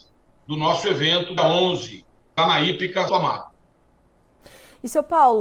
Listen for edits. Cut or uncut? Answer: cut